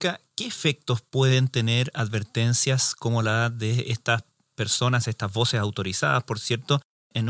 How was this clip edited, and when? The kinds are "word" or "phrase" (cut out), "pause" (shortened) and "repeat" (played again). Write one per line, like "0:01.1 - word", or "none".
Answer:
none